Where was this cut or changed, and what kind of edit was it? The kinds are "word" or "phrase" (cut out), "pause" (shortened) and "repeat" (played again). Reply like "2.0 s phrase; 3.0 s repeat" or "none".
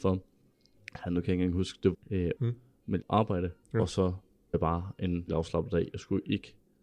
1.9 s word; 2.4 s word; 3.0 s phrase; 3.6 s pause; 4.5 s word; 5.3 s word